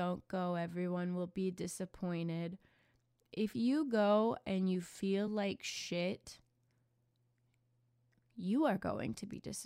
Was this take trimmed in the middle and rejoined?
no; 0 cuts

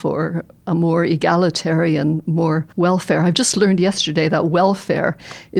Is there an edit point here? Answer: yes; 1 cut; at 2.7 s

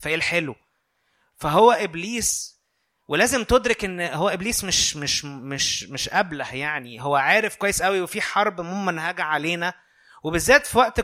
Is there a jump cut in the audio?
no; 0 cuts

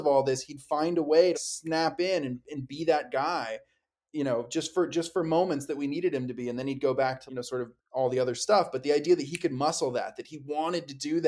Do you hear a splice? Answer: yes; 3 cuts; at 1.3 s, 7.3 s, 7.8 s

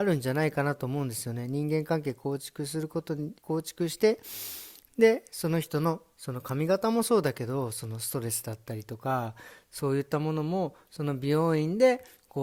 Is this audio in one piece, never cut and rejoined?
no; 1 cut; at 3.4 s

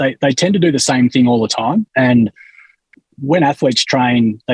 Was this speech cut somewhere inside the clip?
yes; 1 cut; at 1.9 s

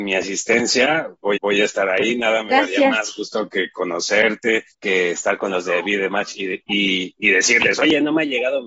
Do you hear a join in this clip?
yes; 2 cuts; at 1.4 s, 4.7 s

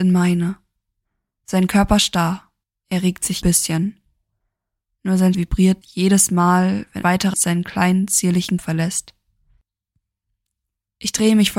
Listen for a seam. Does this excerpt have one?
yes; 7 cuts; at 2.6 s, 3.4 s, 5.3 s, 5.8 s, 7.0 s, 7.3 s, 8.6 s

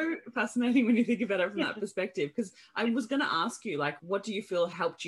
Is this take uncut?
yes; 0 cuts

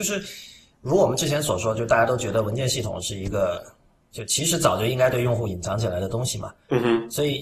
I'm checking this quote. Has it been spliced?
no; 0 cuts

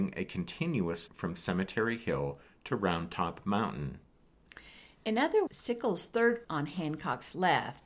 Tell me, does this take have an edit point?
yes; 3 cuts; at 1.1 s, 5.5 s, 6.4 s

